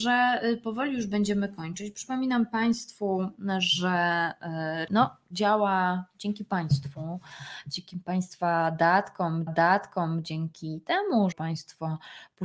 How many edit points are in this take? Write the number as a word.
three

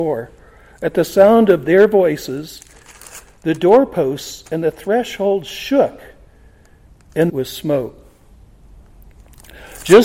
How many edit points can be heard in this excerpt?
one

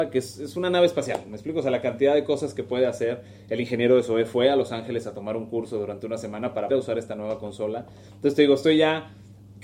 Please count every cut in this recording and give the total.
one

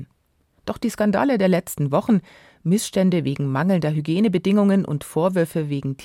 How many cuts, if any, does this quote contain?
zero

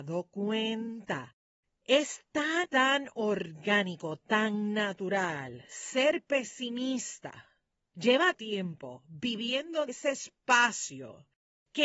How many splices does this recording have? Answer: four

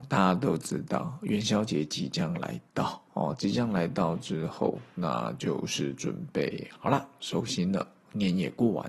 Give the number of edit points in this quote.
one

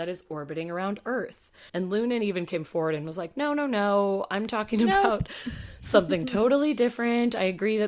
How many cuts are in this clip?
one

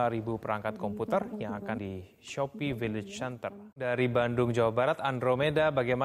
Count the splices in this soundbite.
two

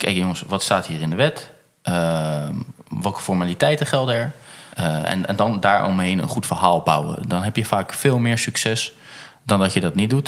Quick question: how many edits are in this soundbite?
one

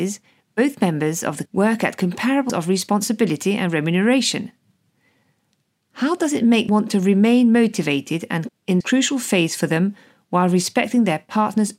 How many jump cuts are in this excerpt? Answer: five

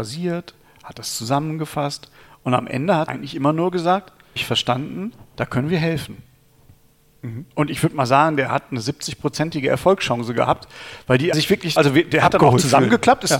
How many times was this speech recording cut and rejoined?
four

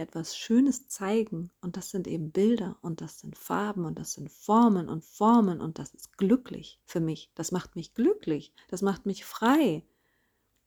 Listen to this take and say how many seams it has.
two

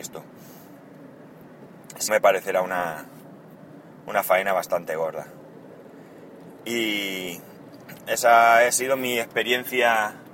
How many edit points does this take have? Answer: two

